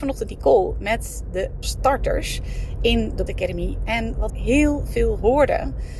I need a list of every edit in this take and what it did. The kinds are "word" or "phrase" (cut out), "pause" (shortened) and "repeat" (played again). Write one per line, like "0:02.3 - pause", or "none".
0:01.6 - word
0:03.3 - word
0:04.3 - word